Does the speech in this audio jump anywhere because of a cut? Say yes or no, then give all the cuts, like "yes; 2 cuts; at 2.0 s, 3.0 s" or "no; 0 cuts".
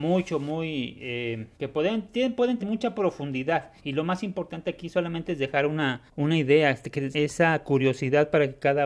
yes; 5 cuts; at 1.5 s, 2.6 s, 3.8 s, 6.1 s, 7.1 s